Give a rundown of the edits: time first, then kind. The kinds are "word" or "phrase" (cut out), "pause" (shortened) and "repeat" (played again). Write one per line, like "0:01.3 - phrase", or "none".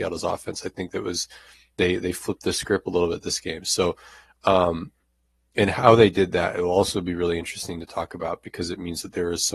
none